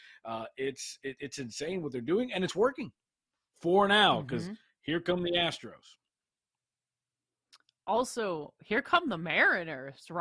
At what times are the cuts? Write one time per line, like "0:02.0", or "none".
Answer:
none